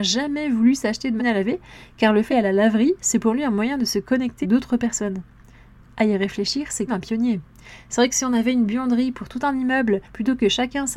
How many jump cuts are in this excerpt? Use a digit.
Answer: 5